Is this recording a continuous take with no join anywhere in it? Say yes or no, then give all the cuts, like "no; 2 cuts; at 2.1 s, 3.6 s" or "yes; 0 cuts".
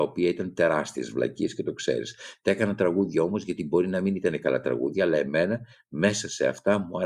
yes; 0 cuts